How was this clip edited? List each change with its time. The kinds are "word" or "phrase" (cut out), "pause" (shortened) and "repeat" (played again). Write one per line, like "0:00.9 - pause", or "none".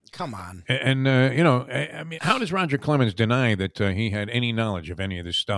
0:02.2 - word

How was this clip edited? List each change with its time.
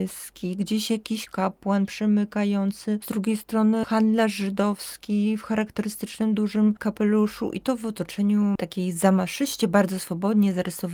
none

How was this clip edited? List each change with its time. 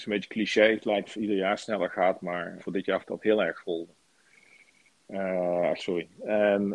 0:01.1 - word
0:02.6 - word
0:03.0 - word
0:05.8 - word

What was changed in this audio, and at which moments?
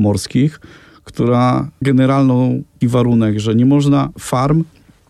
0:01.8 - word
0:02.8 - word
0:04.1 - word

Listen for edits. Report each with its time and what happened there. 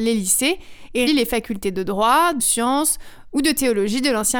0:01.1 - word
0:02.4 - phrase

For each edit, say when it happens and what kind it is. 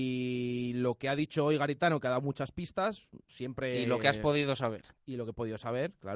0:03.3 - word
0:05.0 - pause

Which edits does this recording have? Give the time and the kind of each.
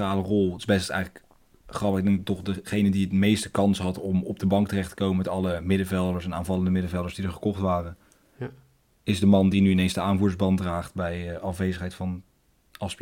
none

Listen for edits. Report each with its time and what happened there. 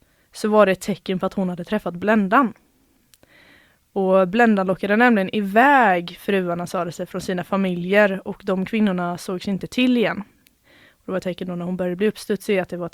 none

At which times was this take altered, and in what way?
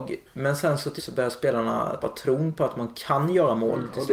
0:01.0 - word
0:02.0 - word

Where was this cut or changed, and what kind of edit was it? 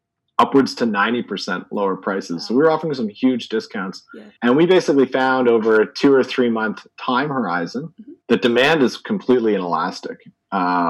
0:04.4 - pause
0:08.2 - pause

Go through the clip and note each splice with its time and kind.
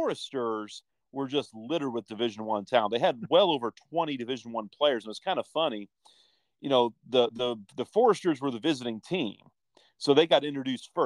none

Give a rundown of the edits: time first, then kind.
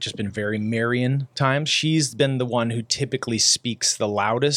none

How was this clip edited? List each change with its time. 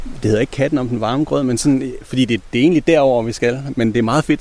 none

